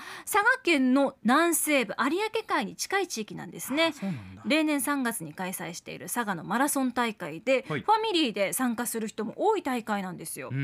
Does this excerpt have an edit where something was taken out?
no; 0 cuts

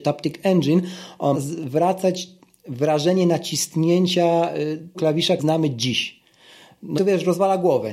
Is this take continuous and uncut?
no; 4 cuts; at 1.3 s, 4.9 s, 5.4 s, 7.0 s

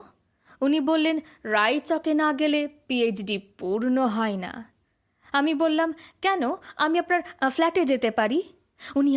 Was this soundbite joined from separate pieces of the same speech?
no; 0 cuts

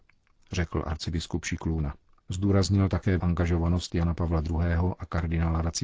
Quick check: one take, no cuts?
no; 1 cut; at 3.2 s

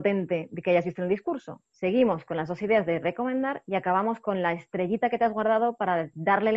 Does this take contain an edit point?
no; 0 cuts

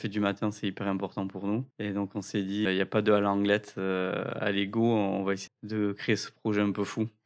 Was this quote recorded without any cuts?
no; 3 cuts; at 1.7 s, 2.7 s, 5.5 s

